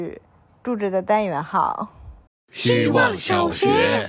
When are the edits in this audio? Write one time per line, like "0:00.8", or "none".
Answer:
0:02.3